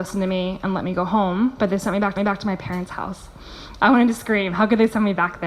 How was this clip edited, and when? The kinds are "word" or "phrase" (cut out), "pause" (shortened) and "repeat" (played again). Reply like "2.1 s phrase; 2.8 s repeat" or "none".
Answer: 2.2 s repeat